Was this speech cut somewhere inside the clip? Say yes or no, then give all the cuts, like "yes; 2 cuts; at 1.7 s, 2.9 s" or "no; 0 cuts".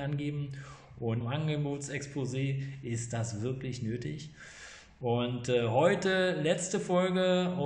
yes; 1 cut; at 1.2 s